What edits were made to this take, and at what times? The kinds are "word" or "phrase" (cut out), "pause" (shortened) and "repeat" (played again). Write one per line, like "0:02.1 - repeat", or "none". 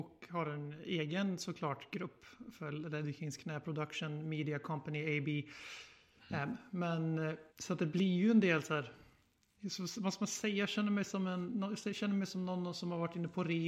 0:07.5 - pause